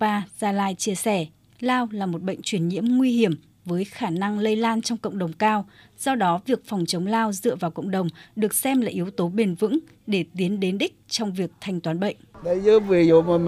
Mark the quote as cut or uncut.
uncut